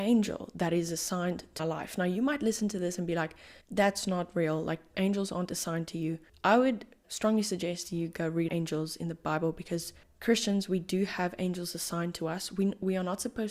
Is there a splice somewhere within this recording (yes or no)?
yes